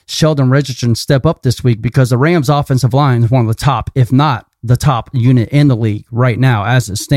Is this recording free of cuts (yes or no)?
yes